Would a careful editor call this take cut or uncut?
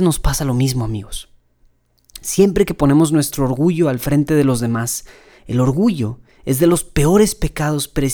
uncut